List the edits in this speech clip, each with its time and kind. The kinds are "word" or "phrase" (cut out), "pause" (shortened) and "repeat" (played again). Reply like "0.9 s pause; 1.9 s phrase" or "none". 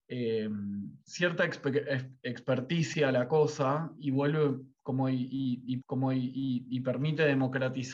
1.0 s pause; 5.8 s repeat